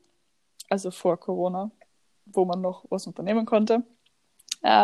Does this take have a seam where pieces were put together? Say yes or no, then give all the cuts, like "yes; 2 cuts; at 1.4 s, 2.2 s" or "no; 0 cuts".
no; 0 cuts